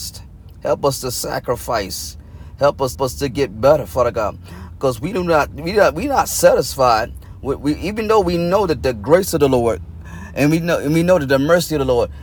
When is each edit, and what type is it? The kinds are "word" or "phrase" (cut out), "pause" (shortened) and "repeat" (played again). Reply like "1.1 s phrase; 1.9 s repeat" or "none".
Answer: 2.9 s repeat